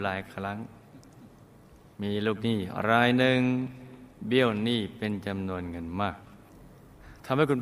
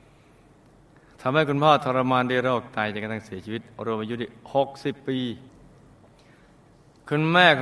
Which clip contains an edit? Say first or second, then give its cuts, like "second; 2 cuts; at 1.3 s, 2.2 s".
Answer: first; 1 cut; at 4.1 s